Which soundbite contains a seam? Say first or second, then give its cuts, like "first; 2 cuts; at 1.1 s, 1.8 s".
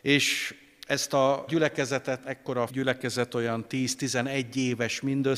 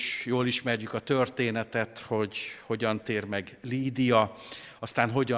first; 3 cuts; at 1.5 s, 2.2 s, 2.7 s